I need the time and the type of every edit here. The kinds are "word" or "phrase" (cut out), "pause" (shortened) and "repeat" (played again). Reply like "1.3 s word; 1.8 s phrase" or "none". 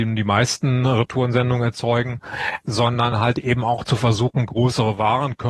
none